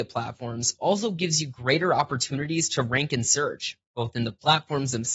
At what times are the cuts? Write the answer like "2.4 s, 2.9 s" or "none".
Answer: none

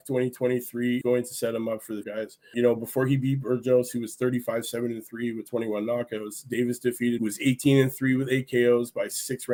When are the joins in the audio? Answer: 1.0 s, 2.0 s, 2.5 s, 7.2 s

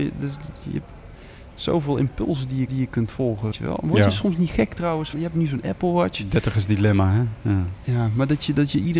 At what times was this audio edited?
2.7 s, 3.5 s, 5.1 s

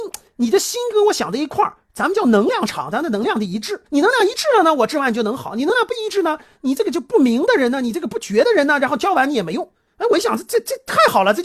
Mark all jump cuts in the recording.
3.9 s, 9.9 s

